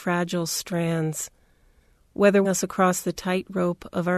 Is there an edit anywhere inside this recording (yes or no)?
yes